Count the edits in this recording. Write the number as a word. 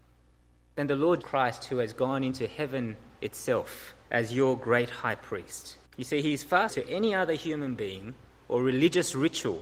four